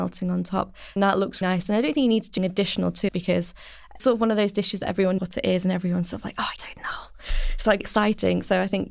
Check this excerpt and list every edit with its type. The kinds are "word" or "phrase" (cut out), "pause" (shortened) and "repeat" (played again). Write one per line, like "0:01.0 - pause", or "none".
0:01.0 - word
0:01.4 - word
0:02.4 - word
0:03.1 - word
0:04.0 - word
0:05.2 - word
0:06.6 - word
0:07.8 - word